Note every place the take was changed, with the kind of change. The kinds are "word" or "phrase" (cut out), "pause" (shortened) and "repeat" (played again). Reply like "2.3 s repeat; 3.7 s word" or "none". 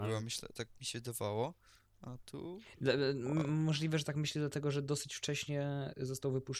none

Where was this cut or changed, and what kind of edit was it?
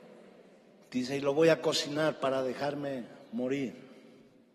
none

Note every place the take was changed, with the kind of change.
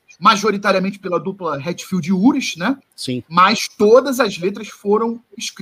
2.8 s pause

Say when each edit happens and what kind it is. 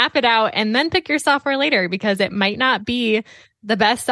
none

